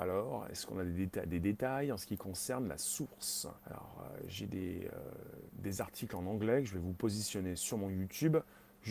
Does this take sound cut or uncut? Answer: cut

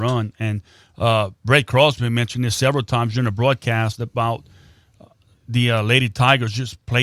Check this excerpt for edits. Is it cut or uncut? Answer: uncut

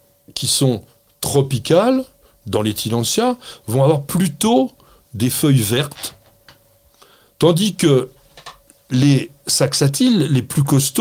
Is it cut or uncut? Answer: uncut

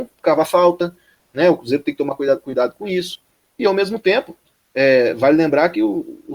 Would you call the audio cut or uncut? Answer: uncut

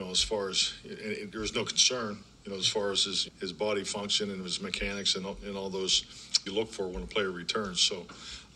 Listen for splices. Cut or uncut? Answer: cut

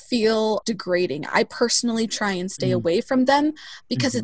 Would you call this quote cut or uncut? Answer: uncut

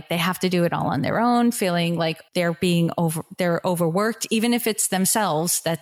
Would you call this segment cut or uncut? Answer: cut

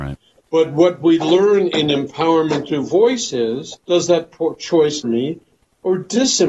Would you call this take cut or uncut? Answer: cut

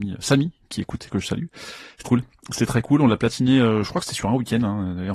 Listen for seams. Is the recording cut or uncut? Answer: cut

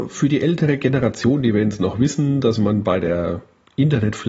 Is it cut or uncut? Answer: uncut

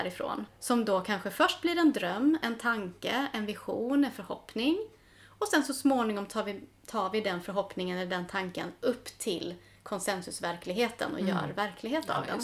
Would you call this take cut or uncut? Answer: uncut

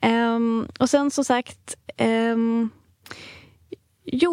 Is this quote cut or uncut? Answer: uncut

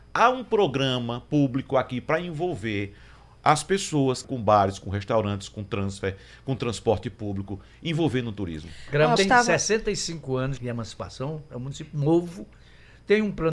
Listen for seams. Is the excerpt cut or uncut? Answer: cut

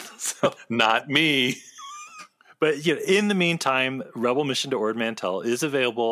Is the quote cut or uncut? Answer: uncut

